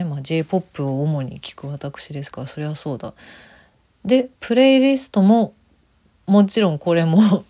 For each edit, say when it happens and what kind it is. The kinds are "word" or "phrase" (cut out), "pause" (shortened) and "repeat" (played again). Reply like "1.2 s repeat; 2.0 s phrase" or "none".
none

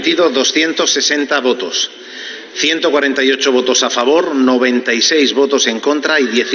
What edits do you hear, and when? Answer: none

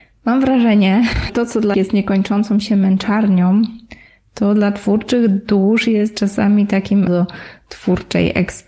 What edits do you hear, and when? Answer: 1.3 s word; 1.7 s word; 7.1 s word

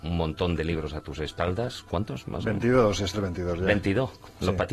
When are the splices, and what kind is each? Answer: 3.1 s word

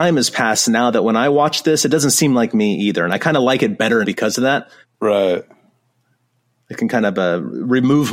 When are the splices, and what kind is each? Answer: 4.0 s word; 4.8 s pause

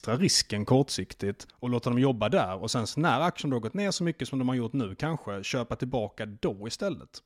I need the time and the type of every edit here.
1.5 s pause

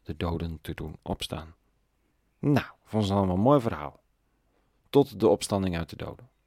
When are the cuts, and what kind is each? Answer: 2.1 s pause

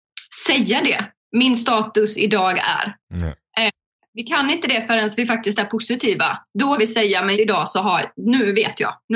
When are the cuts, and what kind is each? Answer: 6.8 s word; 7.3 s word

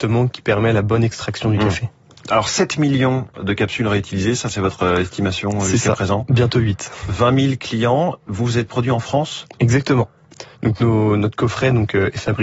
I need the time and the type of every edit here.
none

